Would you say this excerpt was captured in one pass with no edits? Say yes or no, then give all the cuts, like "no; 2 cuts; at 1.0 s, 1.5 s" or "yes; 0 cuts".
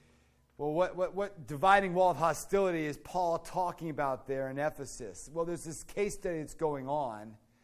yes; 0 cuts